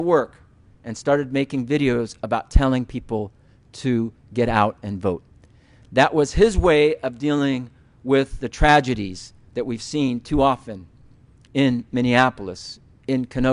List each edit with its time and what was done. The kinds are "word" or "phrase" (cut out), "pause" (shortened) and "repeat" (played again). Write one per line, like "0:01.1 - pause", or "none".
none